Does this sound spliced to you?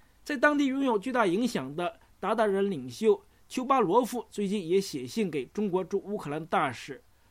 no; 0 cuts

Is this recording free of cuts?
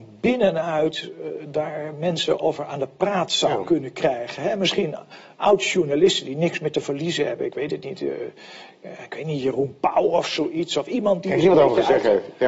yes; 0 cuts

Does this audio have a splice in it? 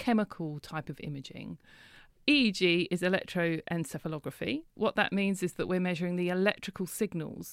no; 0 cuts

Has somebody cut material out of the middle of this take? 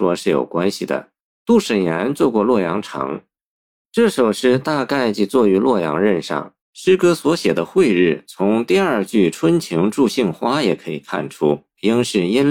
yes; 2 cuts; at 1.2 s, 6.6 s

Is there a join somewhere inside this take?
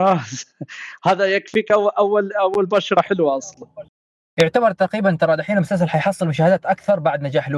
no; 0 cuts

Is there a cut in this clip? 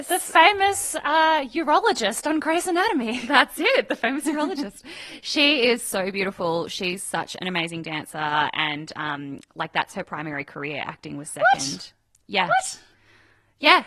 no; 0 cuts

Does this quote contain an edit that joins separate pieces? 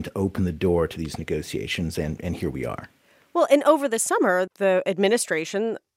yes; 1 cut; at 4.5 s

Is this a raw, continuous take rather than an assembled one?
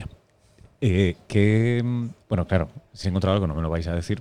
no; 2 cuts; at 2.2 s, 3.0 s

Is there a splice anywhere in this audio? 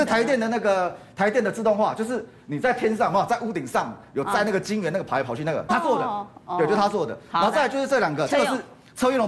yes; 1 cut; at 5.7 s

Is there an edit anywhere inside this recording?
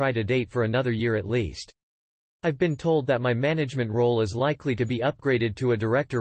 no; 0 cuts

